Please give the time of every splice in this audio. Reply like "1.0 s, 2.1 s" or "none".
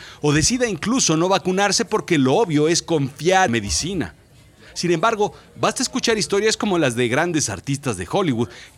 3.5 s